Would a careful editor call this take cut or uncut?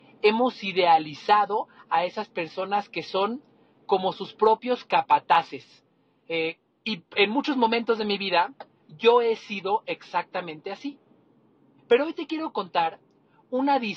uncut